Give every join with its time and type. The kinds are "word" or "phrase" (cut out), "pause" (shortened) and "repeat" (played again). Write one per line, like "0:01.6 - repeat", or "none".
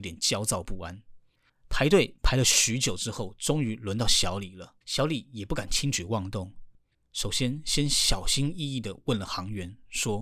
0:04.8 - pause